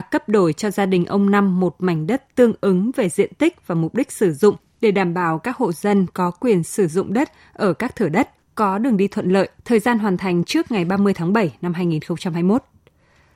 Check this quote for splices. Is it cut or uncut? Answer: cut